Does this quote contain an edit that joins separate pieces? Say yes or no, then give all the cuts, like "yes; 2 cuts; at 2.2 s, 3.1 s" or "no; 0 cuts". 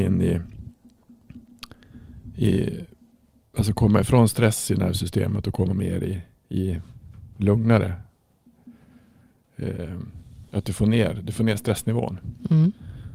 no; 0 cuts